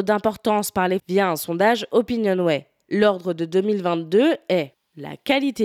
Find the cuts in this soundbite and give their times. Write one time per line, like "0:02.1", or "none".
0:01.0